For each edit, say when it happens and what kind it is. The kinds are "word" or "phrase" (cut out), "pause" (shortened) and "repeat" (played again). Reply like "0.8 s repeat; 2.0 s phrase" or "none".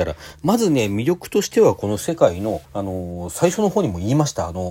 2.7 s pause

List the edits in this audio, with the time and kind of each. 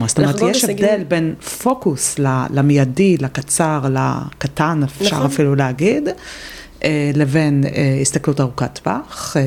none

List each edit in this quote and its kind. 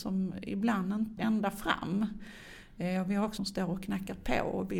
1.2 s word; 3.4 s phrase

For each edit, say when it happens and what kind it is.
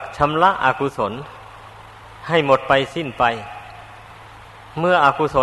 none

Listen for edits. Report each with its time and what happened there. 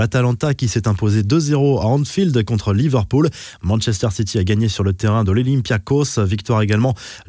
none

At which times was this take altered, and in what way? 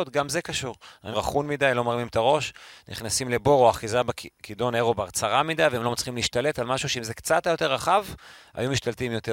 1.1 s phrase

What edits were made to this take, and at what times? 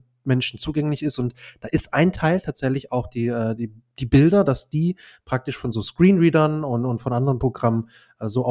none

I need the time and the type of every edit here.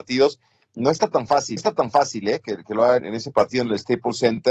1.6 s repeat; 3.0 s word

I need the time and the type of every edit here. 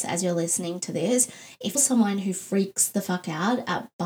1.7 s word

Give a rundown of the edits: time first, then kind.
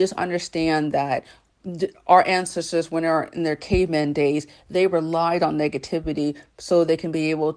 none

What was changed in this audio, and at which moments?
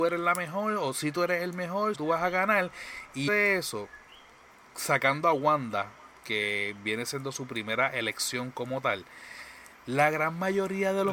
1.9 s word; 3.3 s word

